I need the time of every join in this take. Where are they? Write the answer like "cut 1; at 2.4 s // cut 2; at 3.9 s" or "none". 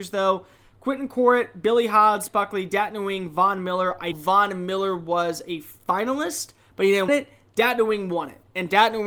cut 1; at 2.3 s // cut 2; at 4.1 s // cut 3; at 7.1 s